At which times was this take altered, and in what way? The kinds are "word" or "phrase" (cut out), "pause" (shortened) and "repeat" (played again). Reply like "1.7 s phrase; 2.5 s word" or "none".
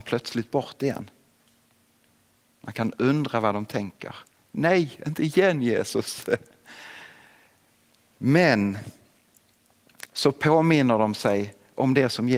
none